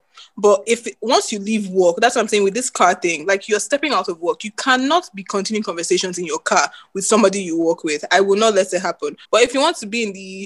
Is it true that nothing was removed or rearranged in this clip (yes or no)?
no